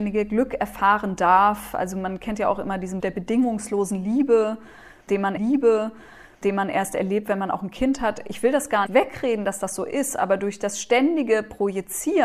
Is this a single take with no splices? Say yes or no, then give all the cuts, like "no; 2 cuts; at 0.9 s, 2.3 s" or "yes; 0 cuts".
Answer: no; 3 cuts; at 3.0 s, 5.4 s, 8.9 s